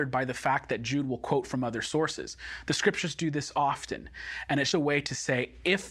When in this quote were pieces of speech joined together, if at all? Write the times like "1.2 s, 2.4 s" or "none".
4.7 s